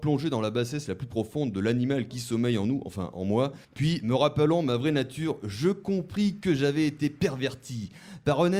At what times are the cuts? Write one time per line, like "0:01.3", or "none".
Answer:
0:03.6

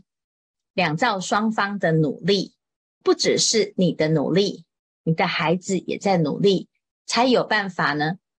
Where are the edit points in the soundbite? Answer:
0:03.0

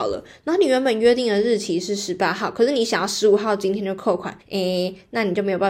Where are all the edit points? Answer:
0:04.4

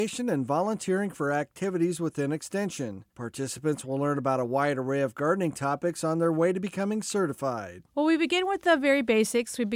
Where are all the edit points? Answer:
0:03.1
0:07.9

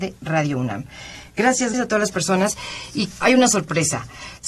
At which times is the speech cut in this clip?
0:01.7
0:03.2

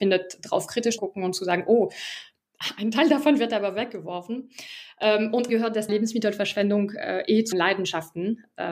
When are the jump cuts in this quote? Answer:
0:01.0
0:05.5
0:05.9
0:07.5

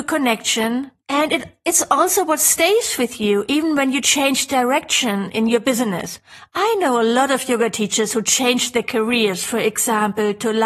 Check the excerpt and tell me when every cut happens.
0:01.0

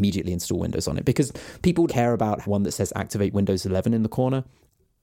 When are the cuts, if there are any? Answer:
0:01.9
0:02.4

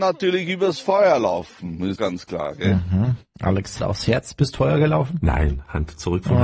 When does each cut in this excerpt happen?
0:02.0
0:03.8
0:04.5

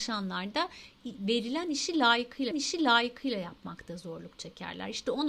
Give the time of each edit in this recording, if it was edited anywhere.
0:02.5

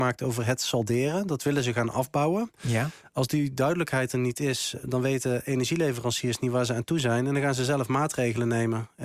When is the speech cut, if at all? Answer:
0:04.8

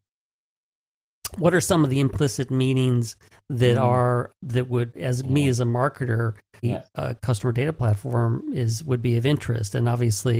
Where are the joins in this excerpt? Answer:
0:03.3
0:04.3
0:04.9
0:06.6

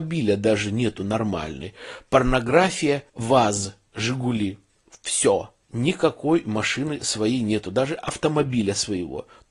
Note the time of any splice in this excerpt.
0:03.1
0:05.6

